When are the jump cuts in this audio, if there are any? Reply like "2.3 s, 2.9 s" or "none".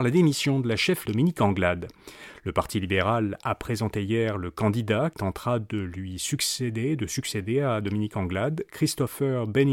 1.1 s, 5.1 s